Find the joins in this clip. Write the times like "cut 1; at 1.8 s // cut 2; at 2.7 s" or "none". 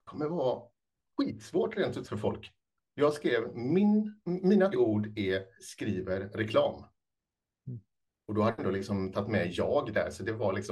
cut 1; at 2.0 s // cut 2; at 4.7 s // cut 3; at 5.6 s // cut 4; at 8.6 s